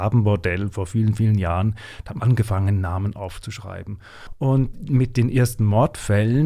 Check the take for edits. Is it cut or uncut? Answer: cut